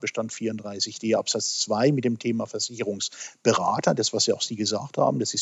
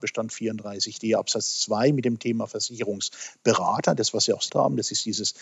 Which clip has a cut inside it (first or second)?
second